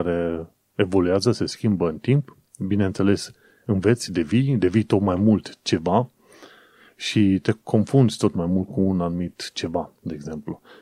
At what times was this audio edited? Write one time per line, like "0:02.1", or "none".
none

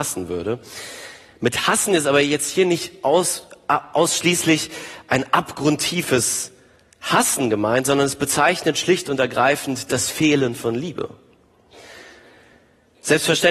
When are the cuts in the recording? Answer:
none

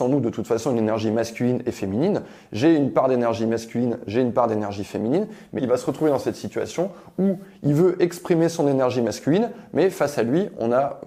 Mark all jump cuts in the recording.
0:05.6

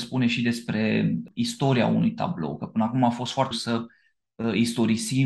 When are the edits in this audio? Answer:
0:03.5

